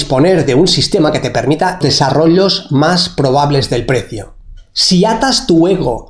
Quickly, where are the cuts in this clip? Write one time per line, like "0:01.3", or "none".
0:01.8